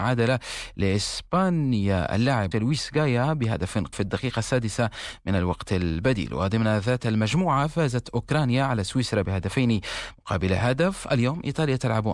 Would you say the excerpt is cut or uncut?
cut